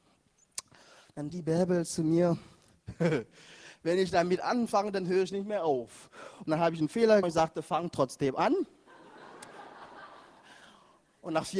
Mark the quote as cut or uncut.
cut